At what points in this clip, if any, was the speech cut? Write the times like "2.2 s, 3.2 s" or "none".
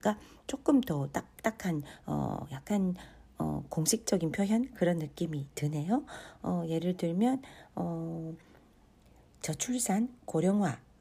none